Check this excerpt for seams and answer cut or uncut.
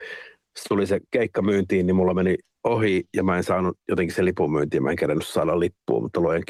uncut